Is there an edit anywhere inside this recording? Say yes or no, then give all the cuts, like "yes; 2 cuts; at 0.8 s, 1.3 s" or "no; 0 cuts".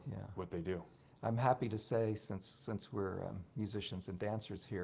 no; 0 cuts